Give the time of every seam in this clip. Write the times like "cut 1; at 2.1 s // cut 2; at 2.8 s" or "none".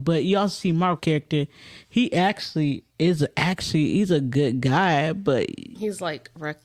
cut 1; at 1.0 s // cut 2; at 2.9 s